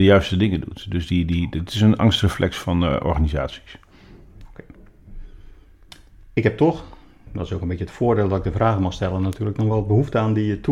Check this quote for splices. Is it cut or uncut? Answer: uncut